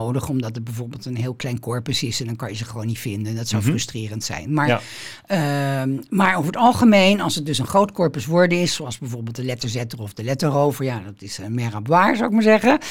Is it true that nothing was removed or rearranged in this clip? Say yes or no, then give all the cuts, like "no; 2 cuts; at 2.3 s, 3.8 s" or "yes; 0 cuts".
yes; 0 cuts